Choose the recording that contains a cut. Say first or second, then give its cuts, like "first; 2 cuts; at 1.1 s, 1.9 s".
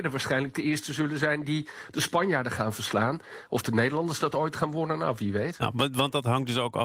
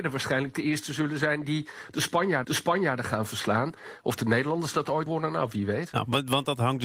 second; 2 cuts; at 2.4 s, 5.1 s